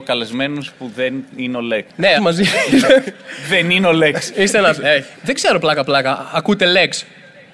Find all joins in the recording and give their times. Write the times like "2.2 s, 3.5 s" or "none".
2.2 s, 5.1 s